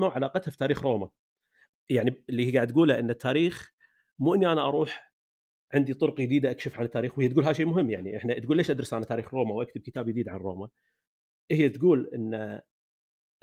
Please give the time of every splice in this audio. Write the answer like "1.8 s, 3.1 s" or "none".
none